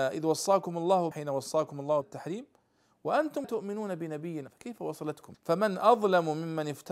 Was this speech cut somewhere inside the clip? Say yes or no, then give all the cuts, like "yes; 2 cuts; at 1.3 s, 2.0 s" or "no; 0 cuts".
yes; 5 cuts; at 1.1 s, 2.0 s, 3.4 s, 4.5 s, 5.3 s